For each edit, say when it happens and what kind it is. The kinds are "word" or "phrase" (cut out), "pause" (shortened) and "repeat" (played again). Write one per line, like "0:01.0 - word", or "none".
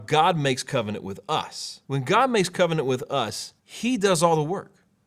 0:01.8 - pause
0:03.6 - pause

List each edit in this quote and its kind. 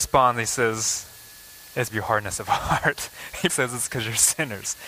0:01.9 - phrase
0:03.5 - word

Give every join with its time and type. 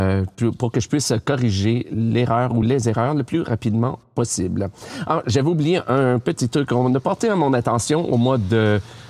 none

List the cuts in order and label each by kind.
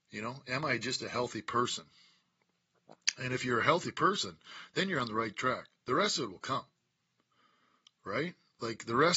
none

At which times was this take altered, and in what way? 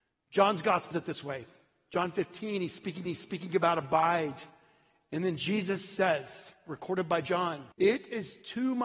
0:00.9 - word
0:03.1 - repeat
0:07.7 - pause

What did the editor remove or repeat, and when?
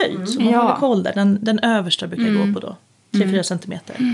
none

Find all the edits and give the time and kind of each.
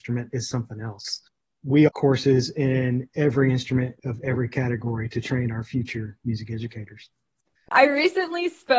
0:01.9 - word

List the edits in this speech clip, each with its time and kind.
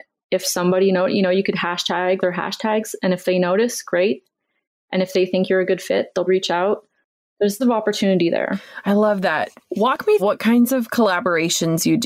0:02.2 - word
0:06.3 - word
0:07.6 - word
0:10.2 - word

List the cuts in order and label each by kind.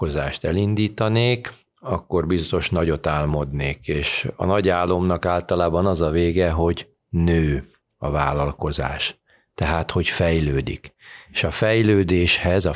none

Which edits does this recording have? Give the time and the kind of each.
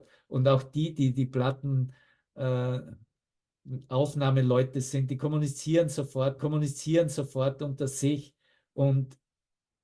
0:06.4 - repeat

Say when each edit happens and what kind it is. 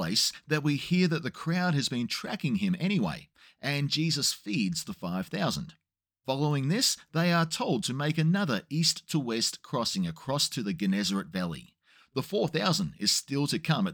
none

